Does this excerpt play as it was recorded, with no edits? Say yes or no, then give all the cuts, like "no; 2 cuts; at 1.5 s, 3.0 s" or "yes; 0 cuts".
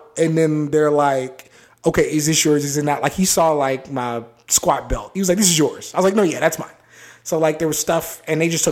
yes; 0 cuts